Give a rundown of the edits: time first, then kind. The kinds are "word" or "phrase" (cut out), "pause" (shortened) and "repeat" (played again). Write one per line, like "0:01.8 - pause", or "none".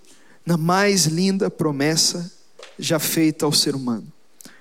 none